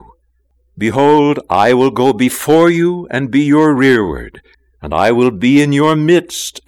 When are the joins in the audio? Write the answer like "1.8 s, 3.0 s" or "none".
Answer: 4.5 s